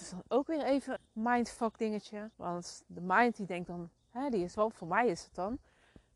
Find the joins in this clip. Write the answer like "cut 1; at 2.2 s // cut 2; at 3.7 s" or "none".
cut 1; at 1.0 s // cut 2; at 2.3 s // cut 3; at 4.5 s